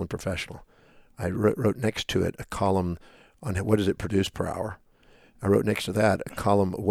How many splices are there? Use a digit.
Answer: 0